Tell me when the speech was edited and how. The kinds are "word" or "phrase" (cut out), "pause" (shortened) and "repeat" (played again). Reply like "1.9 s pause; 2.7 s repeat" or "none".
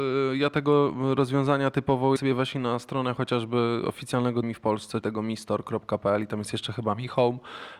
2.2 s word; 4.4 s word; 5.0 s word